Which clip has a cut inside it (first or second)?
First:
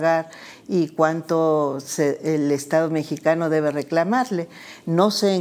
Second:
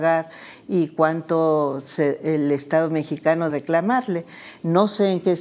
second